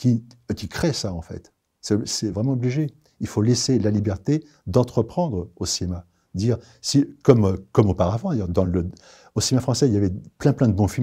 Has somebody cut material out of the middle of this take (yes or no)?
no